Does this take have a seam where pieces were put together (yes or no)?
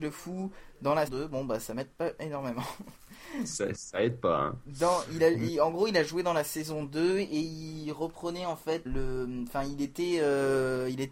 yes